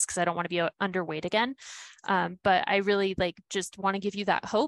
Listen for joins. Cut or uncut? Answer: uncut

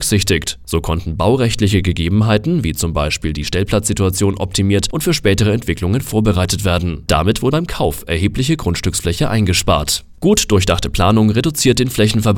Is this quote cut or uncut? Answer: cut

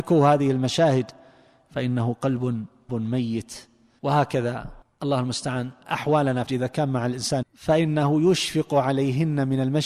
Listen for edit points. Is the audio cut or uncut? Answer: cut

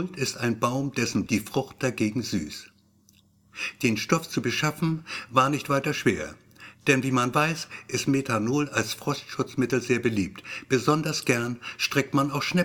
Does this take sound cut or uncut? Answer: cut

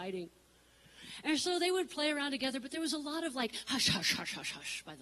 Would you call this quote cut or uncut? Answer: uncut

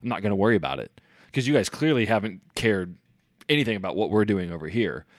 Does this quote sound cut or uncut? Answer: uncut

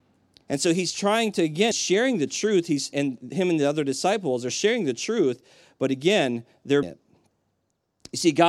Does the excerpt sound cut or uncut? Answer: cut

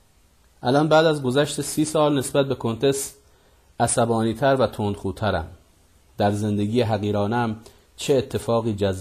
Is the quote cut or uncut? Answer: uncut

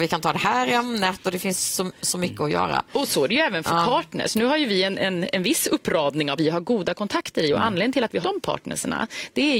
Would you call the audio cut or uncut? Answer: cut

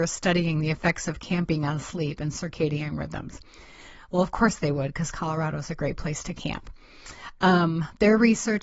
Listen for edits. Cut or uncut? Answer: uncut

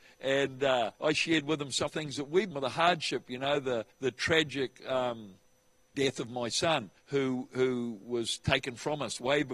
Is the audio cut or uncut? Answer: cut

